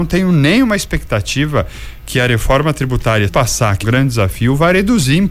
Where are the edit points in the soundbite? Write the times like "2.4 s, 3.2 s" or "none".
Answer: 3.3 s, 3.8 s